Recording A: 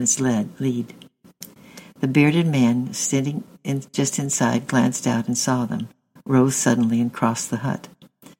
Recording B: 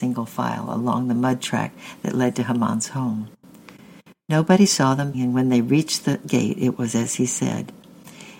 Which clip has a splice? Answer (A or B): B